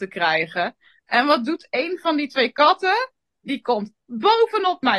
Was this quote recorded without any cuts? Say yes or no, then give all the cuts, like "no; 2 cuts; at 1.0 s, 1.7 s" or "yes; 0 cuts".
yes; 0 cuts